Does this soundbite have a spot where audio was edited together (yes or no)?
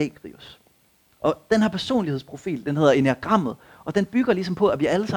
no